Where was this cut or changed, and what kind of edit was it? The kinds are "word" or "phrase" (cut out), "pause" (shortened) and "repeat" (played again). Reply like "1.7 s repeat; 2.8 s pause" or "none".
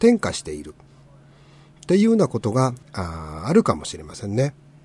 2.8 s pause

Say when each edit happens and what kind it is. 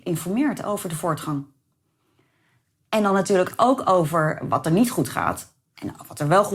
none

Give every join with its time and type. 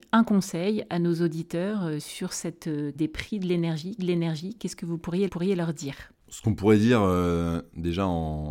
2.9 s word; 4.0 s repeat; 5.3 s repeat; 6.2 s pause

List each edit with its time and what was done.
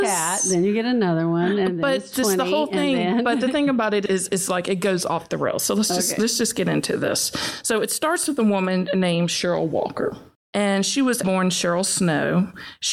11.2 s word

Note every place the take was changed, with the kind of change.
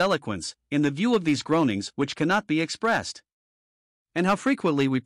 none

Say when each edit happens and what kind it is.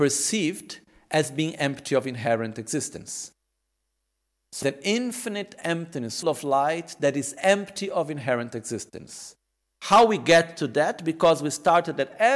4.6 s word; 6.2 s word

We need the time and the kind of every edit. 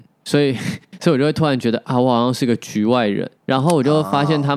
3.4 s pause

